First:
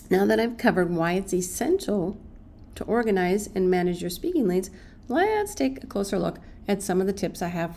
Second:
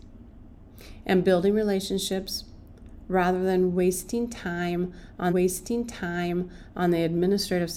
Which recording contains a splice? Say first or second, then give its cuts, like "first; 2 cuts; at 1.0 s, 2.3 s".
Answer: second; 1 cut; at 5.3 s